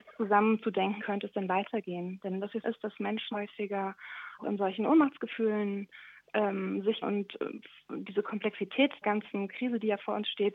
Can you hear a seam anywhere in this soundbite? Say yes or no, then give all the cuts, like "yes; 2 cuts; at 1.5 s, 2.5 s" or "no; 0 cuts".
yes; 6 cuts; at 1.0 s, 2.6 s, 3.3 s, 4.4 s, 7.0 s, 9.0 s